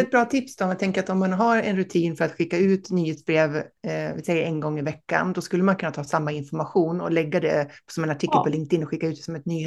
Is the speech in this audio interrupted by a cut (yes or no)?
no